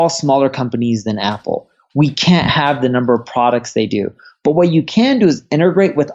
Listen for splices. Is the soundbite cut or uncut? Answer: uncut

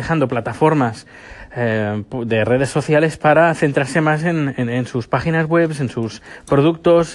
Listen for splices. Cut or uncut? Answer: uncut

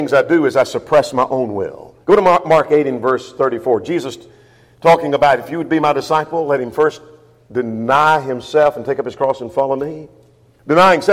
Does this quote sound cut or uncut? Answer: cut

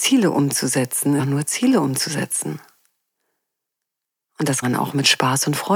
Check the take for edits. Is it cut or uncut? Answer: cut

